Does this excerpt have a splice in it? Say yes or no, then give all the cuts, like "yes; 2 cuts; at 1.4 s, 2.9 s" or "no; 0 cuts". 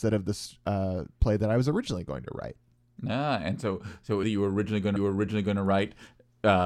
yes; 2 cuts; at 4.2 s, 5.0 s